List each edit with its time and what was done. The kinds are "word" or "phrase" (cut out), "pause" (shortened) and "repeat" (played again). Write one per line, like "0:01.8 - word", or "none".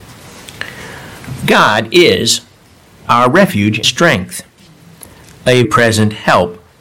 0:03.8 - word
0:05.6 - word